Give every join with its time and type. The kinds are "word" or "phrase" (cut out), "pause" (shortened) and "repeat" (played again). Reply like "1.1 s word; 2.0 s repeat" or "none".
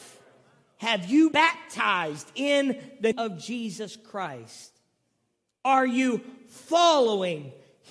1.3 s word; 3.1 s word